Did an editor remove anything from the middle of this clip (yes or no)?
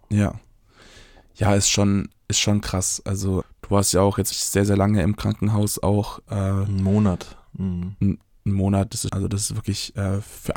yes